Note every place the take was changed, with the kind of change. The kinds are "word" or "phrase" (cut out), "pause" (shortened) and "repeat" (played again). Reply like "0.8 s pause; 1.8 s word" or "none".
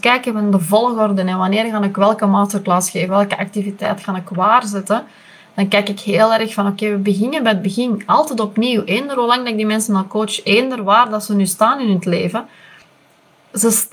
3.1 s word